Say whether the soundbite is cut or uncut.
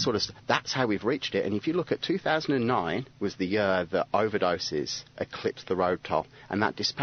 cut